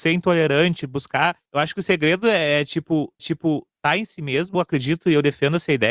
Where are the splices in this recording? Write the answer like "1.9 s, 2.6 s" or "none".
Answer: 1.5 s, 3.2 s, 4.5 s